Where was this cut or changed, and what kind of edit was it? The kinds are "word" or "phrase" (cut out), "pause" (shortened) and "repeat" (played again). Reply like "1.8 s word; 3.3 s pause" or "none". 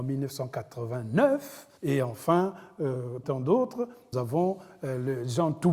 1.8 s pause; 3.2 s word; 4.1 s word